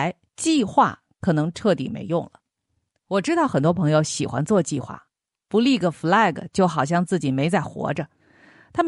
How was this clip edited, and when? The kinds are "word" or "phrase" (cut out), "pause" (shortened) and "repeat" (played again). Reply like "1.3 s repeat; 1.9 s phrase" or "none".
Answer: none